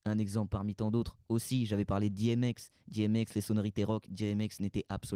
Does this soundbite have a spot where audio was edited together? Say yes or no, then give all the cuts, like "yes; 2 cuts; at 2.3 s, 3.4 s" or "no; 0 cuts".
no; 0 cuts